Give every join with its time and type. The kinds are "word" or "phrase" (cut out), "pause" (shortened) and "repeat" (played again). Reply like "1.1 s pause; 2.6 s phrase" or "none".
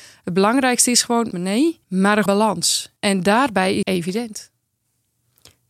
1.3 s word; 1.8 s pause; 2.3 s word; 3.0 s pause; 3.8 s word